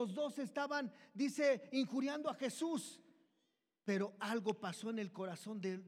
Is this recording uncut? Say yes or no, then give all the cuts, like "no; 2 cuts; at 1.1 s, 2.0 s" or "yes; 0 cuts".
yes; 0 cuts